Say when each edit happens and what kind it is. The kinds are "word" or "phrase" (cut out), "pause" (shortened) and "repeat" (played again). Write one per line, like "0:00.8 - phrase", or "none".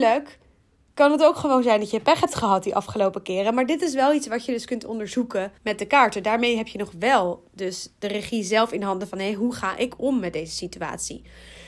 0:05.6 - pause